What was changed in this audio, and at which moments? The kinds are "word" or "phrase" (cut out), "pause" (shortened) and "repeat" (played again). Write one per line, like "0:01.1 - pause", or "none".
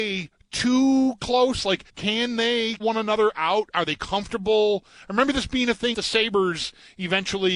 0:01.9 - pause
0:02.8 - word
0:05.9 - word